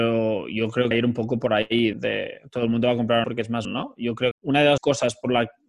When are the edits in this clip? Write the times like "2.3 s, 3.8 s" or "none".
0.9 s, 1.9 s, 3.2 s, 3.6 s, 4.3 s, 4.8 s